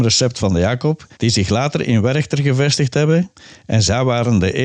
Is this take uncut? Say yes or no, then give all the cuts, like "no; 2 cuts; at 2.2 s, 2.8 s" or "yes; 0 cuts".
no; 1 cut; at 1.1 s